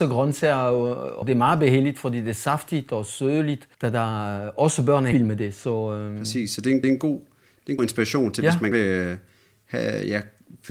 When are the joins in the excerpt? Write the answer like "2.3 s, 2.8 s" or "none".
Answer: 1.2 s, 3.7 s, 5.1 s, 6.8 s, 7.8 s, 8.7 s